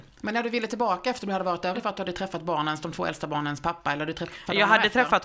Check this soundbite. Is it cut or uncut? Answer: cut